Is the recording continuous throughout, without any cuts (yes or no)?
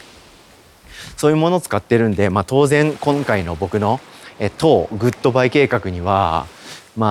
yes